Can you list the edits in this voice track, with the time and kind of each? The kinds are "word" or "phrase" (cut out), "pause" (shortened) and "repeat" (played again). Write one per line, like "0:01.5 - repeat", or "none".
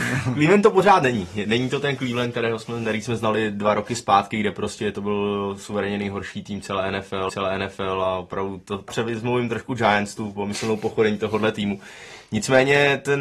0:07.3 - repeat
0:08.9 - word